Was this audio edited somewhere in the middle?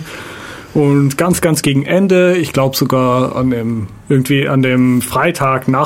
no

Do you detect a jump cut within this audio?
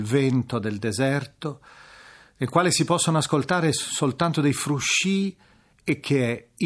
no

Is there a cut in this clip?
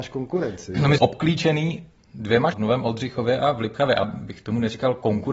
yes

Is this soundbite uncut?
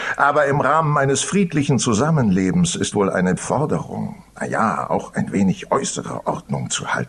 no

